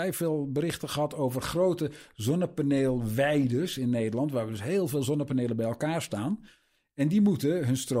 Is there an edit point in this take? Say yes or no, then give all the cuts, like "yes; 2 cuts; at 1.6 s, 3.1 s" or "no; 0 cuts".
no; 0 cuts